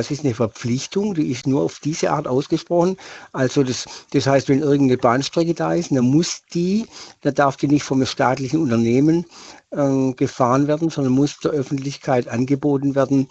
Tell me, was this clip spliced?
no; 0 cuts

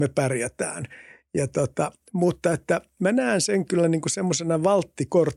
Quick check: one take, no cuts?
yes; 0 cuts

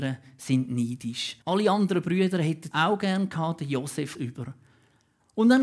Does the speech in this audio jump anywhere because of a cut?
yes; 3 cuts; at 1.4 s, 2.7 s, 4.1 s

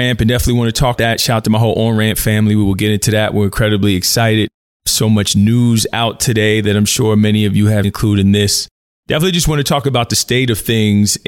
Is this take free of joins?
no; 2 cuts; at 1.0 s, 7.8 s

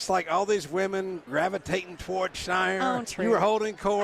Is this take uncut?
no; 3 cuts; at 1.3 s, 2.3 s, 3.0 s

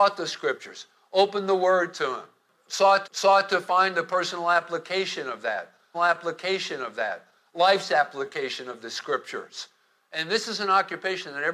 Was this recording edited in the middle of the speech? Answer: yes; 2 cuts; at 3.0 s, 5.9 s

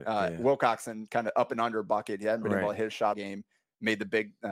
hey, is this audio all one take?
no; 1 cut; at 3.1 s

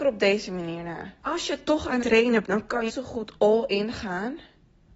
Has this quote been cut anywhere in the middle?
yes; 5 cuts; at 1.2 s, 2.0 s, 2.4 s, 2.9 s, 3.4 s

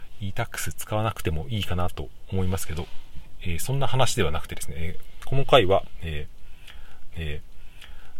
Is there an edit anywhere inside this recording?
yes; 1 cut; at 7.1 s

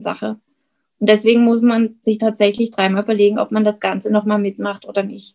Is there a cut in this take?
no; 0 cuts

